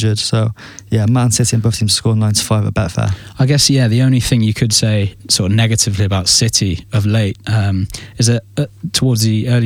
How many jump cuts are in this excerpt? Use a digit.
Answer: 1